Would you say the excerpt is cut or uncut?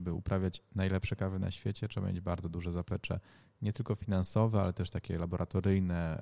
uncut